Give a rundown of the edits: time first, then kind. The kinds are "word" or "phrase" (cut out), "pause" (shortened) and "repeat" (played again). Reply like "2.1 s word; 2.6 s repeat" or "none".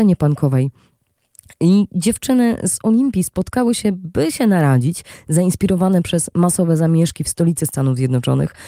none